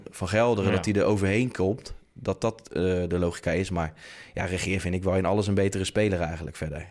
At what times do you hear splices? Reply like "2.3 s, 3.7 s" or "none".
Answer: none